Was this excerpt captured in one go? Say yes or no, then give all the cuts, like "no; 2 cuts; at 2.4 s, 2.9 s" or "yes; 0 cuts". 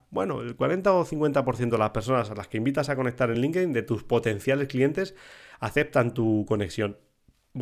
yes; 0 cuts